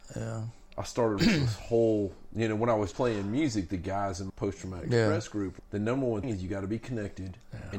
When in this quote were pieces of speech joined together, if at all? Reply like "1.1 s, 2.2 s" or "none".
1.2 s, 2.9 s, 4.3 s, 5.6 s, 6.2 s

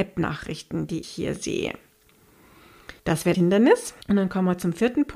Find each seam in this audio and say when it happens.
1.0 s, 3.0 s, 3.3 s, 4.0 s

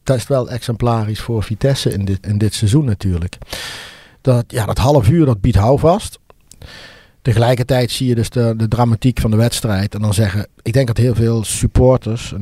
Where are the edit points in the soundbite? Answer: 2.2 s

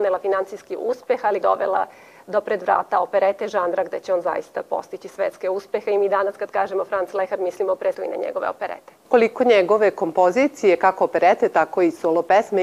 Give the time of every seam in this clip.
1.4 s, 7.9 s

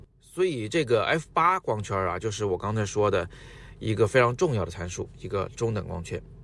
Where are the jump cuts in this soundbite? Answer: none

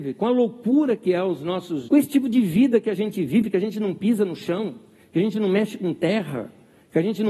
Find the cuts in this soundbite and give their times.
1.9 s

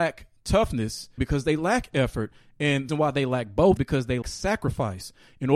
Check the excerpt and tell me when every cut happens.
1.2 s, 2.9 s, 3.8 s, 4.2 s

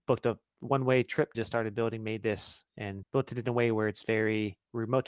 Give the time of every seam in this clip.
1.3 s, 3.0 s

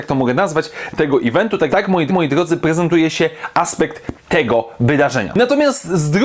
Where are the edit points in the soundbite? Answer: 0.9 s, 1.7 s, 2.1 s, 4.2 s

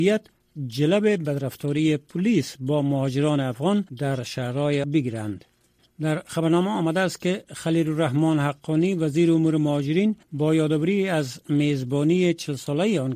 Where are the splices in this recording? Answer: 3.9 s, 4.8 s, 10.2 s

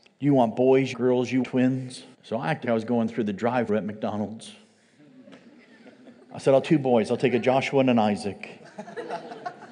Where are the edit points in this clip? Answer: 0.9 s, 1.4 s, 2.1 s, 2.6 s, 3.7 s, 6.6 s

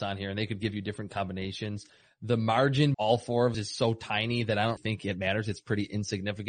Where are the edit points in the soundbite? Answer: 2.9 s, 3.5 s, 4.8 s

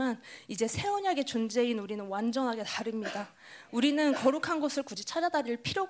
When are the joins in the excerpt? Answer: none

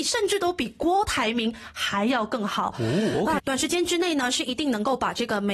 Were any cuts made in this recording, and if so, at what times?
none

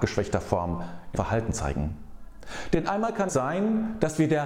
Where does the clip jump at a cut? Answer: 1.1 s, 3.3 s

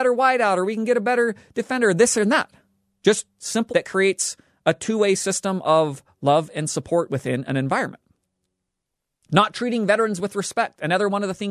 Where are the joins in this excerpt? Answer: 3.7 s

